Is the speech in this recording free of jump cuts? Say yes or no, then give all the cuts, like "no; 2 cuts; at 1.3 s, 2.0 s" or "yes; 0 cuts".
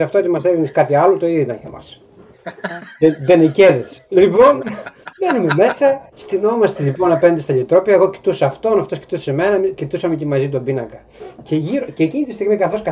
no; 2 cuts; at 5.1 s, 6.1 s